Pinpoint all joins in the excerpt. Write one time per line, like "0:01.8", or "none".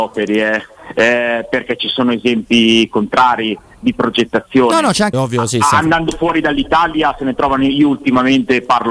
0:05.1